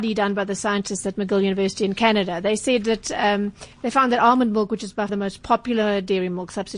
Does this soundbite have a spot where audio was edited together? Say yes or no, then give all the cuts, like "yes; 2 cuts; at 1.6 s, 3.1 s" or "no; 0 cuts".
yes; 2 cuts; at 3.7 s, 5.1 s